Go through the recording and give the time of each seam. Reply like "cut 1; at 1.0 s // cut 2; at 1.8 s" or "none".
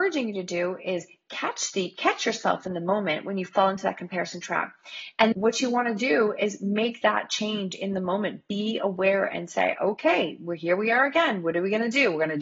cut 1; at 5.3 s